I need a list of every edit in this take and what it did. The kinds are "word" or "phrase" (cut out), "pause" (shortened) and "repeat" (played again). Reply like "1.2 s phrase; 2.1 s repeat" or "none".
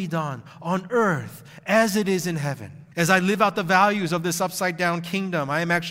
2.9 s pause

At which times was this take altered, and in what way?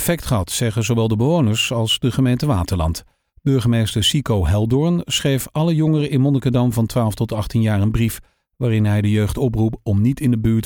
none

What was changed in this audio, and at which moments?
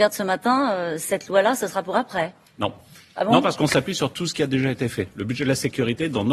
none

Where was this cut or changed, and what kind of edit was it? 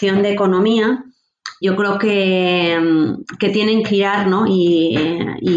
1.6 s word; 3.8 s word

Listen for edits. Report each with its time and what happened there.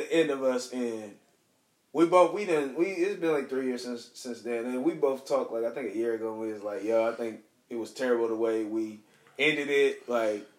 none

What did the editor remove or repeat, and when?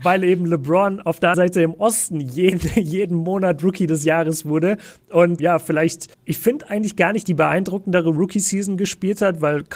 1.3 s word; 5.4 s word; 6.1 s pause

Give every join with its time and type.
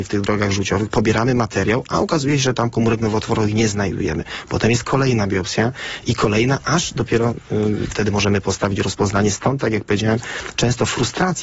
7.9 s word

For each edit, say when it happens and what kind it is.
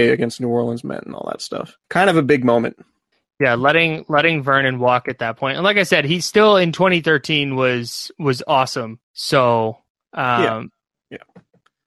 1.8 s pause; 3.1 s pause; 9.0 s pause

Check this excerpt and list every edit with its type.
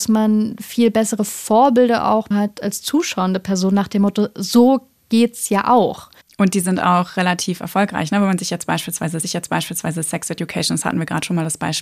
2.3 s word; 6.2 s pause; 9.2 s repeat

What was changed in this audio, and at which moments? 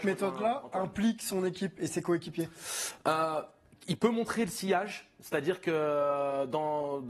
none

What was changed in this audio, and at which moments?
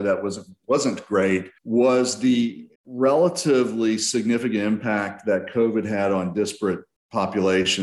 1.6 s pause; 2.7 s pause

